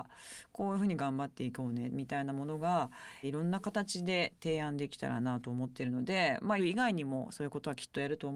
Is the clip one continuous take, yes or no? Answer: no